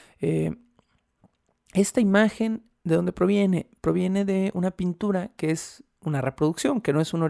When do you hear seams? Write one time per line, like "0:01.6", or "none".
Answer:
none